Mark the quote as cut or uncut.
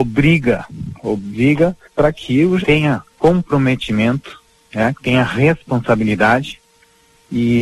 cut